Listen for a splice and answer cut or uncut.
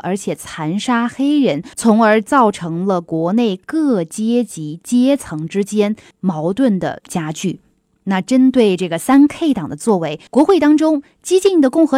cut